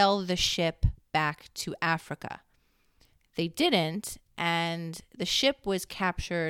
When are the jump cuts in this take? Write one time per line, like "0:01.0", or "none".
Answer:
none